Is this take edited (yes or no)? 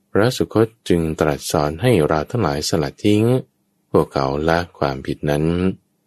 yes